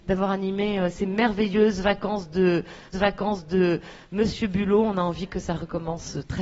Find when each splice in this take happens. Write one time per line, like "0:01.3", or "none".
0:02.9